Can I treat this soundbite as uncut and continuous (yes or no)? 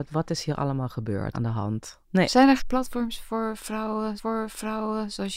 no